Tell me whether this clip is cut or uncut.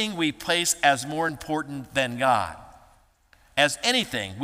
uncut